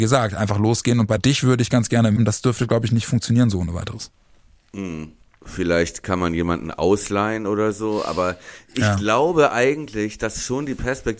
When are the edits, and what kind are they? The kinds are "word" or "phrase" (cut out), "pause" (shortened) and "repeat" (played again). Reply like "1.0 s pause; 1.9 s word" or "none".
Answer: 1.2 s phrase; 2.2 s phrase; 5.2 s pause